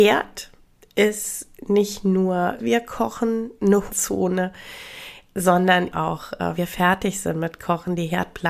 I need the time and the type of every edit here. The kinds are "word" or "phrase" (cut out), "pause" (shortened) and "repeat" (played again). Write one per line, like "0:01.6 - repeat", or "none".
0:02.6 - word
0:03.9 - word
0:05.9 - word
0:06.6 - word